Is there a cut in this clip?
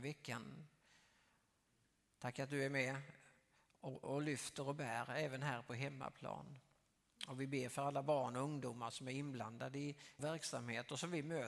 yes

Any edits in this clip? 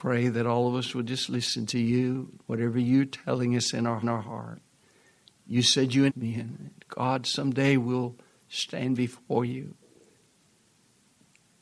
yes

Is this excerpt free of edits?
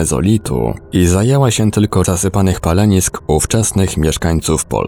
no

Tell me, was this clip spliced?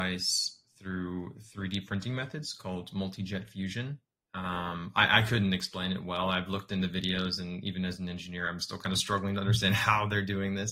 yes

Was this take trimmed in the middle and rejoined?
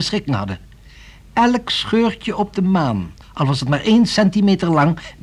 yes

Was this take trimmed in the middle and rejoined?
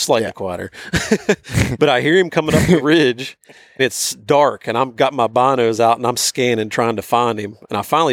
yes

